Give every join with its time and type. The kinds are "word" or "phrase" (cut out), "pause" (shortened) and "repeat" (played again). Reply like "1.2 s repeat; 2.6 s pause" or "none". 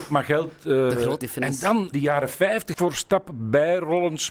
1.2 s word; 1.9 s word; 2.7 s word